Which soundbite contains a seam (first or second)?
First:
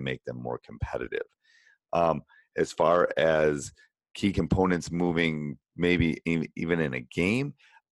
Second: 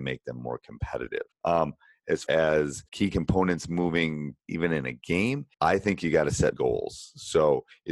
second